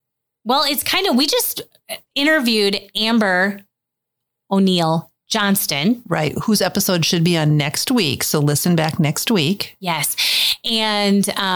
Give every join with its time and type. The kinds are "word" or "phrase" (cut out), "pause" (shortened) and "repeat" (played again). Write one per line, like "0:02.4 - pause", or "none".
none